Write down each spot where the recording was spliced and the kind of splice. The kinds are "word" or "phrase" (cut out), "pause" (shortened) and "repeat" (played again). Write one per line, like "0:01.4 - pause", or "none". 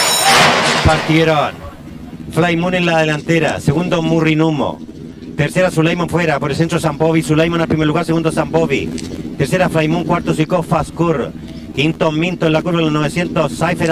0:06.1 - word